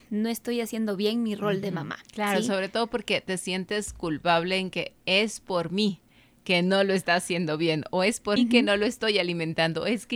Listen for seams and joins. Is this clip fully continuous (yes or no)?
no